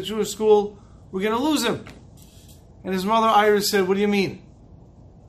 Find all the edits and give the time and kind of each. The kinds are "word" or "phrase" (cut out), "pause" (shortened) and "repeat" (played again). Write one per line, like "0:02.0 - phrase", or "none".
none